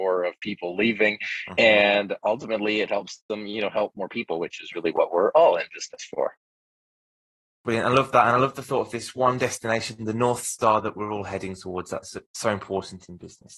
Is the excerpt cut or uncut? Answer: uncut